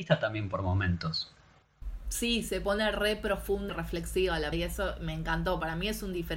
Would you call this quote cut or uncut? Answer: cut